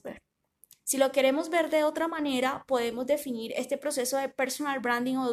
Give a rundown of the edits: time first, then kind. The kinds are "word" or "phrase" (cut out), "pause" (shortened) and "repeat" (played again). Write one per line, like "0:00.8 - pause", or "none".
none